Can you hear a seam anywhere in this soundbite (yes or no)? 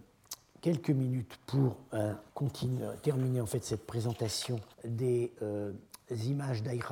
yes